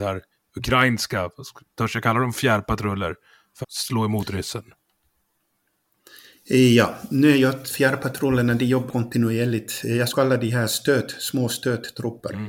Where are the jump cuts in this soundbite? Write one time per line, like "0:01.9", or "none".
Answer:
0:03.6
0:07.6
0:08.9
0:10.1